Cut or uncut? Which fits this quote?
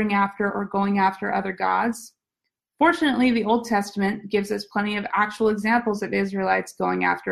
uncut